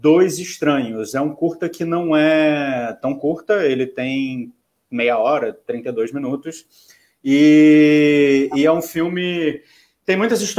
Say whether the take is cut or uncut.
uncut